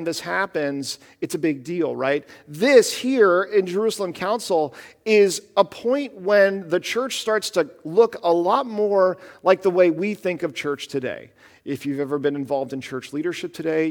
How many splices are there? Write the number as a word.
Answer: zero